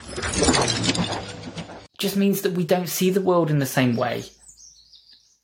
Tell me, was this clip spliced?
no; 0 cuts

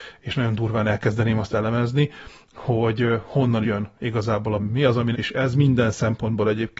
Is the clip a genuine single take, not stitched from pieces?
no; 3 cuts; at 3.6 s, 4.6 s, 5.1 s

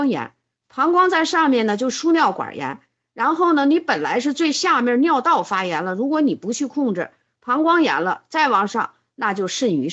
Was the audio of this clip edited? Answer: no; 0 cuts

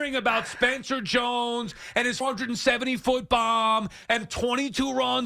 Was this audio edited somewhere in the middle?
yes; 1 cut; at 2.2 s

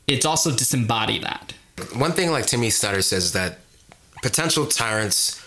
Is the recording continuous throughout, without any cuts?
no; 1 cut; at 1.2 s

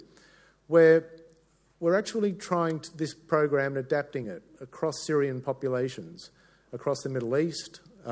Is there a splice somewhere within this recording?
no; 0 cuts

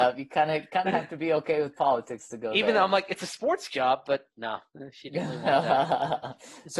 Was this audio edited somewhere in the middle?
yes; 1 cut; at 4.3 s

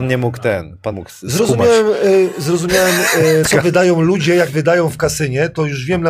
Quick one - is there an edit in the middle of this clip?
yes; 3 cuts; at 0.9 s, 3.4 s, 4.5 s

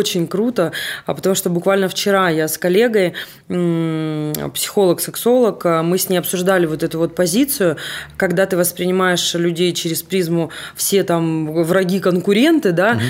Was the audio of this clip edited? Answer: no; 0 cuts

